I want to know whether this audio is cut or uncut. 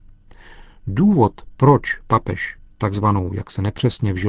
uncut